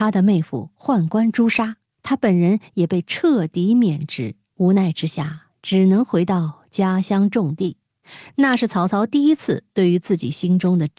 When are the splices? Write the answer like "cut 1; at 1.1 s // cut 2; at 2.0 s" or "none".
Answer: none